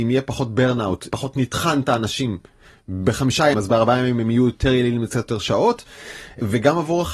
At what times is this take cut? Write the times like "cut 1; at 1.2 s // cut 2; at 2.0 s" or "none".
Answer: cut 1; at 1.1 s // cut 2; at 3.5 s